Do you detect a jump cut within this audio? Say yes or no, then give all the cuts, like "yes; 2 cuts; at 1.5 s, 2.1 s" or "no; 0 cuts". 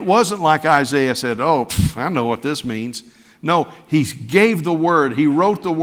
no; 0 cuts